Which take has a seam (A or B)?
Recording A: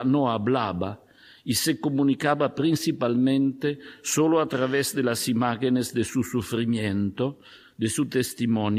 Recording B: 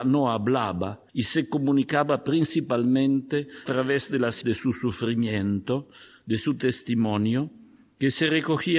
B